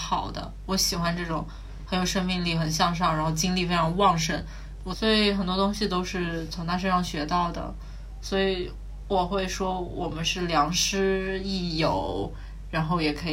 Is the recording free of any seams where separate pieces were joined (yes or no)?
yes